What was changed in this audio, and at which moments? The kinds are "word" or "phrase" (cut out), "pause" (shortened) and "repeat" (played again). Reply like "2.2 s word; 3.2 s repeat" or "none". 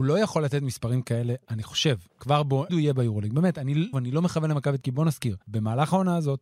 2.1 s pause; 2.7 s word; 3.9 s word; 4.8 s word; 5.4 s pause